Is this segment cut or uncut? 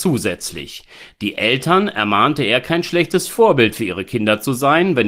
uncut